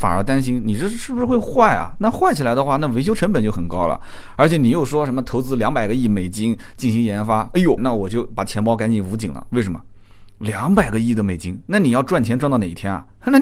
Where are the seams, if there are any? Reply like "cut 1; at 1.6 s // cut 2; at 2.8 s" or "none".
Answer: cut 1; at 7.8 s